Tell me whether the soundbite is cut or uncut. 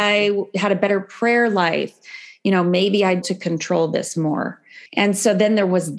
cut